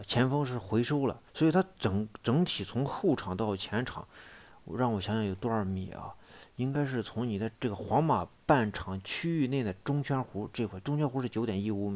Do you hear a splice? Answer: yes; 2 cuts; at 1.3 s, 7.5 s

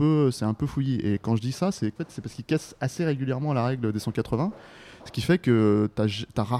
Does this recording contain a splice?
yes; 1 cut; at 2.0 s

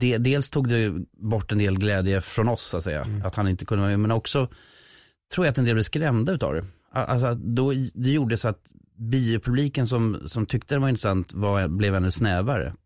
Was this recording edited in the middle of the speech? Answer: yes; 1 cut; at 1.1 s

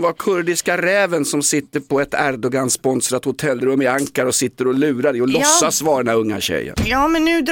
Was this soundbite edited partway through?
no; 0 cuts

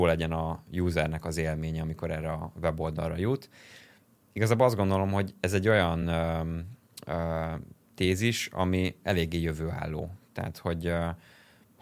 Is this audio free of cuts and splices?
yes; 0 cuts

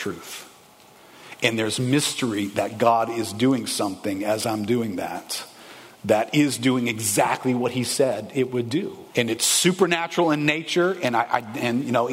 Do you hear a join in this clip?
yes; 1 cut; at 9.1 s

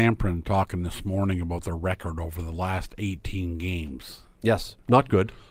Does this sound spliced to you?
no; 0 cuts

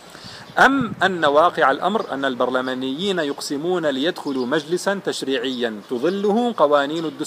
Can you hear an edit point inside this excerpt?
no; 0 cuts

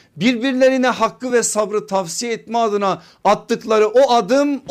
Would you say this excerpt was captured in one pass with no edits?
yes; 0 cuts

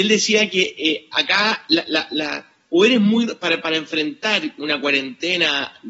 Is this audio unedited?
yes; 0 cuts

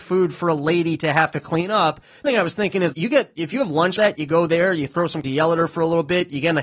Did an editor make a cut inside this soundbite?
yes; 4 cuts; at 2.2 s, 2.9 s, 4.0 s, 5.2 s

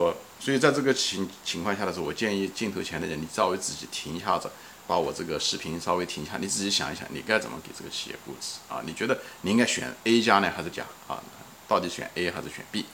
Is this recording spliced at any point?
yes; 2 cuts; at 4.8 s, 10.7 s

